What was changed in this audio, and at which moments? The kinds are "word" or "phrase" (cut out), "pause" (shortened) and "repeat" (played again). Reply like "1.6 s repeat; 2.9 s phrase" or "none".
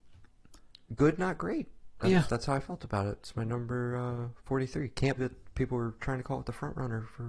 5.2 s word